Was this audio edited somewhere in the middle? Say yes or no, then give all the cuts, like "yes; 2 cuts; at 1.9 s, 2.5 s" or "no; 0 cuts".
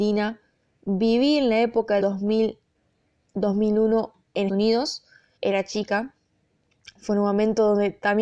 yes; 3 cuts; at 2.0 s, 4.5 s, 5.4 s